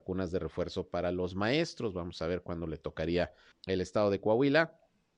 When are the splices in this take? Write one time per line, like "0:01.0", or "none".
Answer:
0:03.5